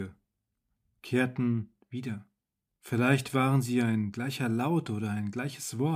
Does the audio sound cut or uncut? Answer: cut